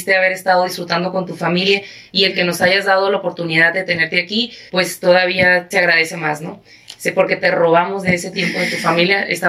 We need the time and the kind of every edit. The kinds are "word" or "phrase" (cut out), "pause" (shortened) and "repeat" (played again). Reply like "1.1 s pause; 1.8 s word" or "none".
4.7 s pause; 5.7 s word